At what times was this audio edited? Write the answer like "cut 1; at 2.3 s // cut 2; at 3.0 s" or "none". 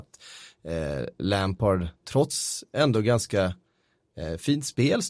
none